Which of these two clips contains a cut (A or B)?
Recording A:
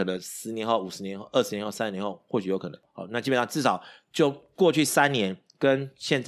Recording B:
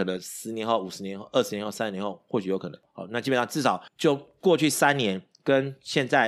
B